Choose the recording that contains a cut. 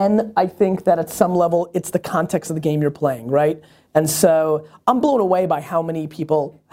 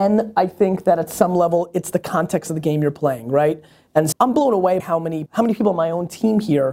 second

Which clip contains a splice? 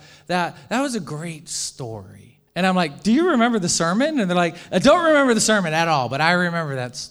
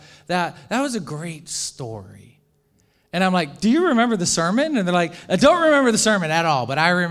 first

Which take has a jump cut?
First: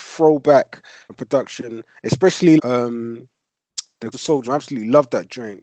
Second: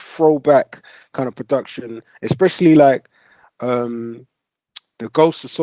first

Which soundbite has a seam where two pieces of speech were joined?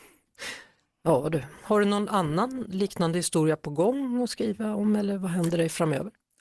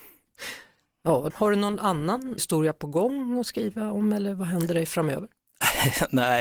second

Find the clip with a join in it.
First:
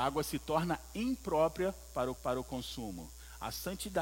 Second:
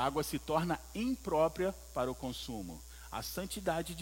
first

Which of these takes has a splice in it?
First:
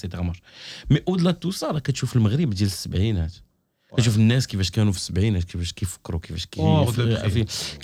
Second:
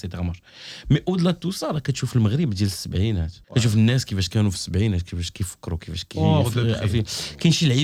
second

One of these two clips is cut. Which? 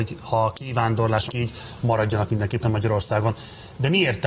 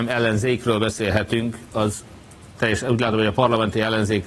first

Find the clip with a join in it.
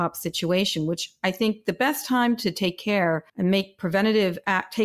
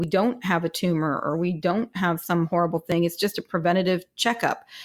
first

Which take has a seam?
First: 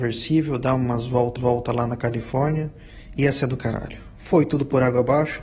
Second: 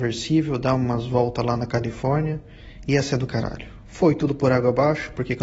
first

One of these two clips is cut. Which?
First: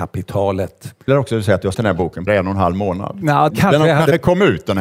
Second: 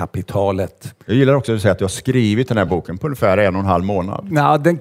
first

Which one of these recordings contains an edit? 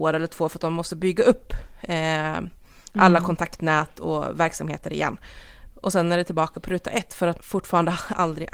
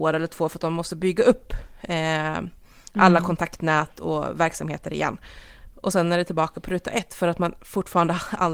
first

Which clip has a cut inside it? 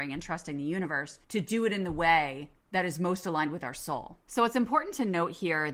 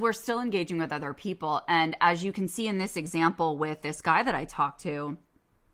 first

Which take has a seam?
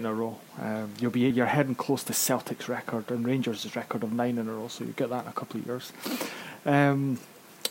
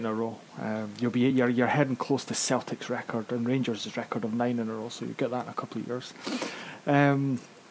first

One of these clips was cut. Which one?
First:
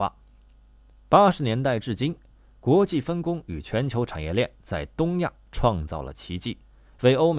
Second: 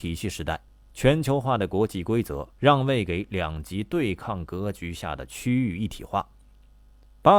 second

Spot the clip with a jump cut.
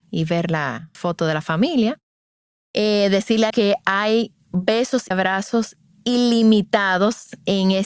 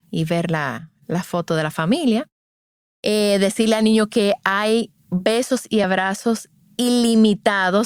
first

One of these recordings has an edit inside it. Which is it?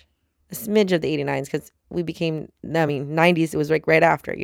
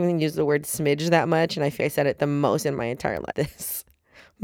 second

